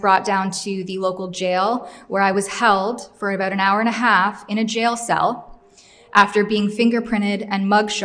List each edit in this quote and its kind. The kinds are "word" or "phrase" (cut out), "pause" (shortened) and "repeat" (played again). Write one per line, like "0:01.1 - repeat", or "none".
none

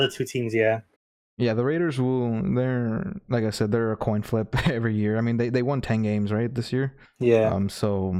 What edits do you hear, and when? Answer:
0:01.0 - pause
0:07.1 - pause

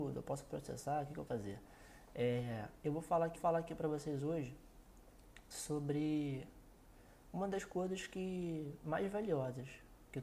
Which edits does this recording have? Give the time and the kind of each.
0:01.3 - word
0:03.4 - repeat

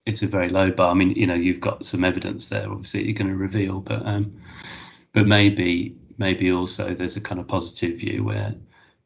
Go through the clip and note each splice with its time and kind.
none

